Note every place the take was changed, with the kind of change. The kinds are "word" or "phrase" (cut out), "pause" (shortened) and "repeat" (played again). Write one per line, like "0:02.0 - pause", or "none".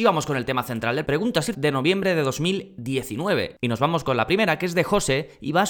0:01.0 - word
0:01.5 - word